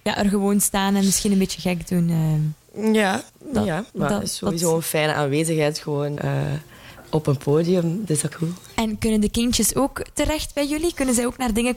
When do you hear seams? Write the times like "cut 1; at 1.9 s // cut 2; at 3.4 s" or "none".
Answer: cut 1; at 3.3 s // cut 2; at 3.9 s // cut 3; at 6.2 s // cut 4; at 8.3 s